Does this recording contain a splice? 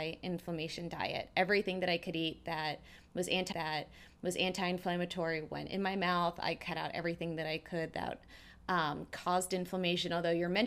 yes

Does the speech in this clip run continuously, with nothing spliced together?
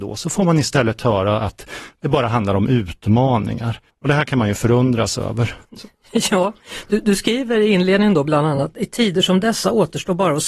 no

